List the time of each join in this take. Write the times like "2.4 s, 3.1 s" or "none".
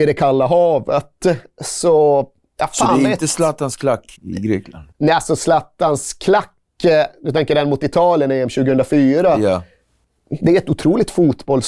4.1 s